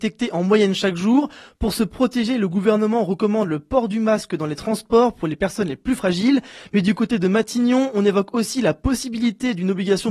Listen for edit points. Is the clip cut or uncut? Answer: uncut